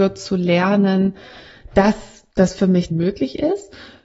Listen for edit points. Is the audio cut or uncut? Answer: cut